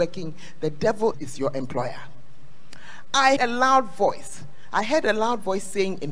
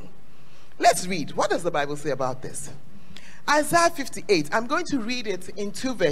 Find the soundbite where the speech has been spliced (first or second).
first